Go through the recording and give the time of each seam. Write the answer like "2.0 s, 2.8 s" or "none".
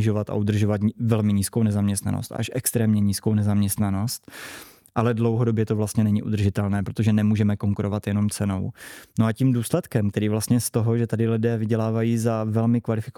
none